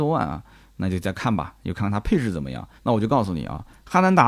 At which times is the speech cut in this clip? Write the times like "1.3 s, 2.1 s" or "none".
2.8 s